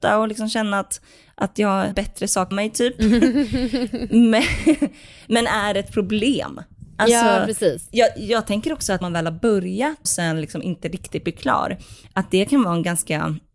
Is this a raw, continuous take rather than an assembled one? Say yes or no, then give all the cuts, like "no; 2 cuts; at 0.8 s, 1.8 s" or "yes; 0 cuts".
no; 4 cuts; at 1.9 s, 2.5 s, 9.0 s, 10.1 s